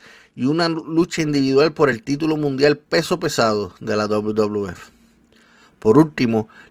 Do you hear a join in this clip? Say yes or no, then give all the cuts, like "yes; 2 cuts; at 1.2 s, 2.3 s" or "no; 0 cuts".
no; 0 cuts